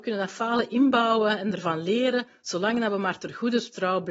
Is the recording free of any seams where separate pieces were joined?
yes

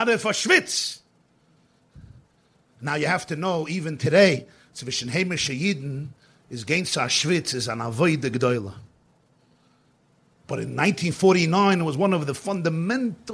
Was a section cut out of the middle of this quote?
no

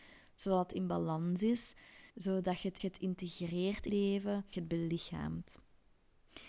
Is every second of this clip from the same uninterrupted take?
no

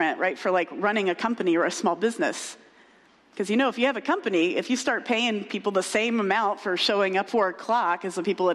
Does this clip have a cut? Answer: yes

